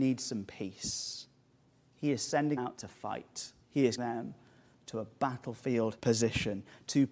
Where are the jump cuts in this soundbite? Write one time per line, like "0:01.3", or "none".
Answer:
0:02.6
0:03.6
0:04.0
0:06.0